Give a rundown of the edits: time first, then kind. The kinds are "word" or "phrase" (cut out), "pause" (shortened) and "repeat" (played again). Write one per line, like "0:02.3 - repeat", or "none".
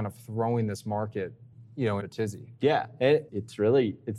0:02.0 - phrase
0:03.3 - word